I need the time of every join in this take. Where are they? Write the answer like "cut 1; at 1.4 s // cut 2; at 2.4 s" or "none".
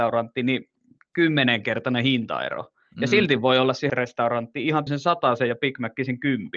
cut 1; at 3.9 s // cut 2; at 4.9 s